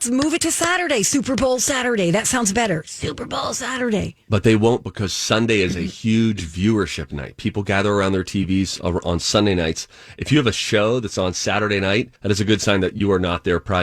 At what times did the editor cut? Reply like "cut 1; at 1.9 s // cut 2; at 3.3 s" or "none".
cut 1; at 12.2 s